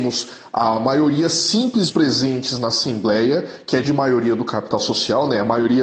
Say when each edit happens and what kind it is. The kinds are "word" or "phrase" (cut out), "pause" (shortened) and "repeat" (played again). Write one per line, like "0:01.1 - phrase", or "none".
0:01.9 - word
0:03.8 - word

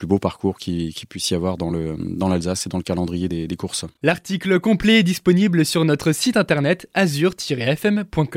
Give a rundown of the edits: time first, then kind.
none

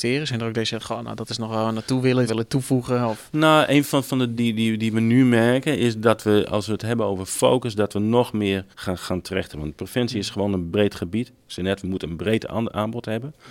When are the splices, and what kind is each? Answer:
0:02.3 - word
0:04.0 - word
0:04.4 - word
0:08.7 - pause
0:10.7 - word

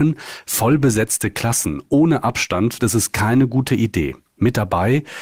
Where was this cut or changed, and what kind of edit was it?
0:02.8 - word

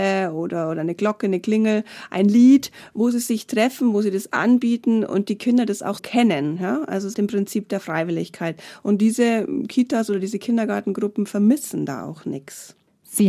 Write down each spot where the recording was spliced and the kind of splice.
0:06.0 - word
0:07.1 - phrase

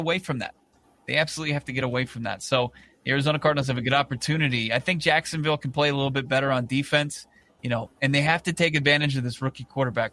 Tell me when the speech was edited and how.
none

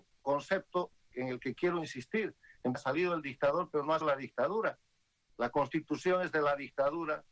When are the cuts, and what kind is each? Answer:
0:02.7 - word
0:04.0 - word

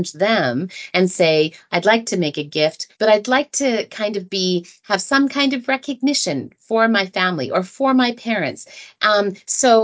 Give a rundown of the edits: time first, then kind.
0:02.9 - pause

